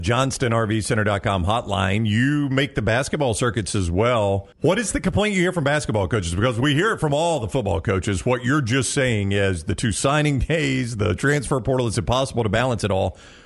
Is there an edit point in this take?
yes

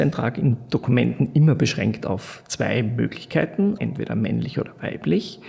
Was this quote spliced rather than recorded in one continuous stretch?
yes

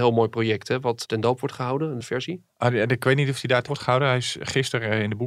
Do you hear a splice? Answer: yes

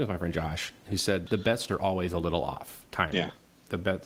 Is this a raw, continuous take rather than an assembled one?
no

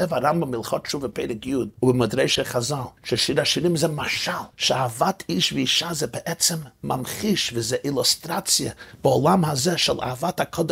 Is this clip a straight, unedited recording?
no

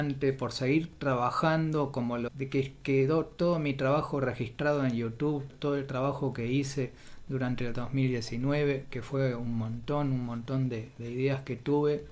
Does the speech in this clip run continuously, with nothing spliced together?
no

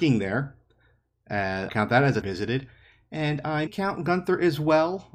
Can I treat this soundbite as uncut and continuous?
no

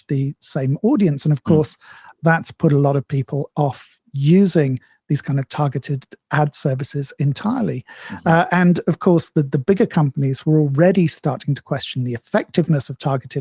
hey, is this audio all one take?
yes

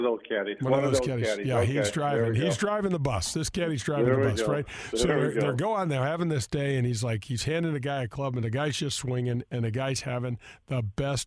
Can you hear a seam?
no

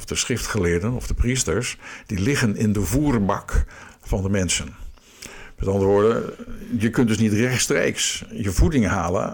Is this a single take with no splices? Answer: yes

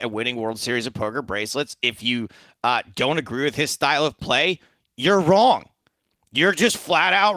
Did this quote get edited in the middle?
no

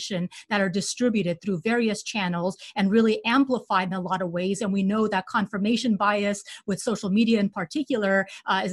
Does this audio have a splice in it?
no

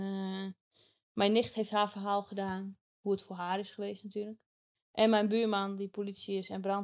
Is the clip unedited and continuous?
yes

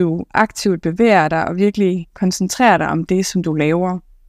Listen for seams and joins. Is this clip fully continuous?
yes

